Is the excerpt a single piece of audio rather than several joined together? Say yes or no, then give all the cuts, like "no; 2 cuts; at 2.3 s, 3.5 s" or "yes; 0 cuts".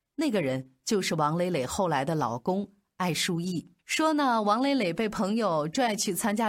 no; 1 cut; at 3.8 s